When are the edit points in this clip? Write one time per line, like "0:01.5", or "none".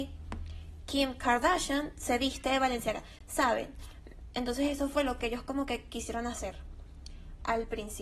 none